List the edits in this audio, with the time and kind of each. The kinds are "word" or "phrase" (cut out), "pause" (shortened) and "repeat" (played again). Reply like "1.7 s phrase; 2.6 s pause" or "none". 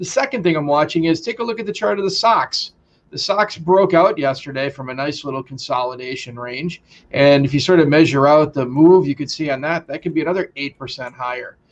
none